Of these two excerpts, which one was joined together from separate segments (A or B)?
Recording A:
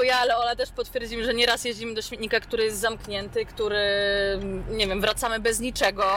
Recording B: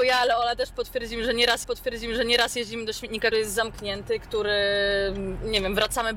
B